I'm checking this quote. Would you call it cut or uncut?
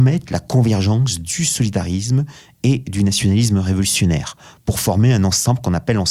uncut